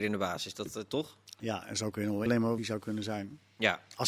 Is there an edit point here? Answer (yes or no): yes